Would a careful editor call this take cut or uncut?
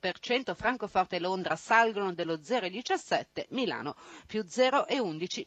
uncut